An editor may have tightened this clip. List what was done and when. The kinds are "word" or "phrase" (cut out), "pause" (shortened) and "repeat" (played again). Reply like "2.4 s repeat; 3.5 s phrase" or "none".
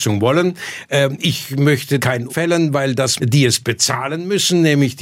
2.0 s word; 2.3 s word; 3.2 s phrase